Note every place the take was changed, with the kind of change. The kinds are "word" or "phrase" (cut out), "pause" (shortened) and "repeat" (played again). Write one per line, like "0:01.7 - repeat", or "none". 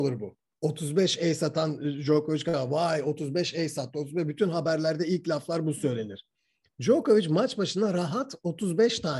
none